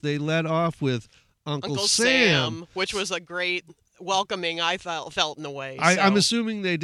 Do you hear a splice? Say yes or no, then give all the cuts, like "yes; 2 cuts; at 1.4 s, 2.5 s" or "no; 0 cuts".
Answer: no; 0 cuts